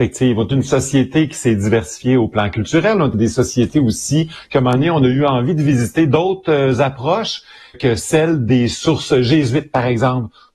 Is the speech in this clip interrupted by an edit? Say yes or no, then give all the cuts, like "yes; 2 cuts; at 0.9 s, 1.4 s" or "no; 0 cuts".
yes; 2 cuts; at 3.1 s, 7.7 s